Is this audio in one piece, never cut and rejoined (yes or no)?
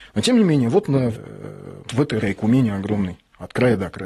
no